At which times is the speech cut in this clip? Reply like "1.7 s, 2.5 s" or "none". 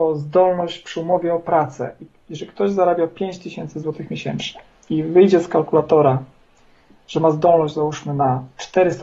none